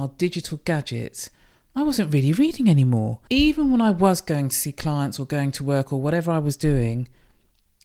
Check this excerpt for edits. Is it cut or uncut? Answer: uncut